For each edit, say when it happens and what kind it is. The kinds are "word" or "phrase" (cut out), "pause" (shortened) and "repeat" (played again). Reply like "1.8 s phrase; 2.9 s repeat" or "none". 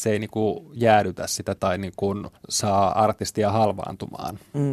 1.6 s word; 2.4 s pause